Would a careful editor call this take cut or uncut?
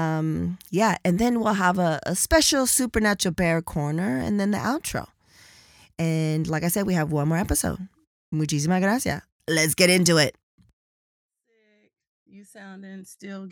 uncut